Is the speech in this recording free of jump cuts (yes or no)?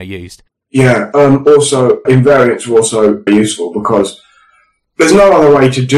no